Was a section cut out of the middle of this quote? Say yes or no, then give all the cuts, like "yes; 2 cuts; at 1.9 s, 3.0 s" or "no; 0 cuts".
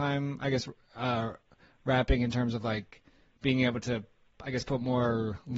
no; 0 cuts